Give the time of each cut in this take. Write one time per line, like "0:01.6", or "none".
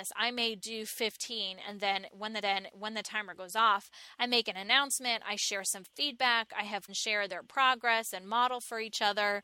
0:02.4
0:06.9